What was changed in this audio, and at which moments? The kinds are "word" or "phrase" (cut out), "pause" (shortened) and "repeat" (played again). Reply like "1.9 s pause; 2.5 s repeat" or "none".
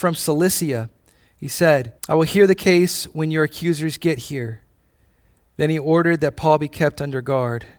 2.0 s pause